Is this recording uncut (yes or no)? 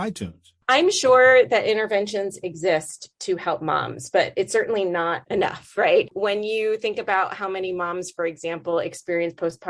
yes